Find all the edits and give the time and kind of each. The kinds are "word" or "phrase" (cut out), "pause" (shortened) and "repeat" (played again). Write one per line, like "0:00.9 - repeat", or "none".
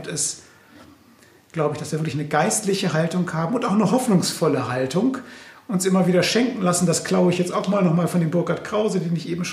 none